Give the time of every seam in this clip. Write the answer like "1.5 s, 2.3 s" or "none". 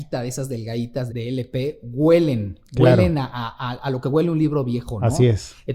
1.1 s